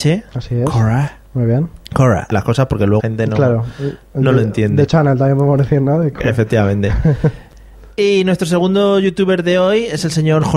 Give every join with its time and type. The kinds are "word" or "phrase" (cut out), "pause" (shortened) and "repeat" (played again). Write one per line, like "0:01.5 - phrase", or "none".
0:01.8 - pause
0:02.3 - phrase
0:03.0 - word